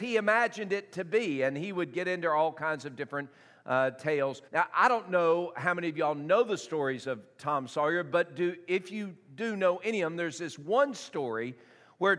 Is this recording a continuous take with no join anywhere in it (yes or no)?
no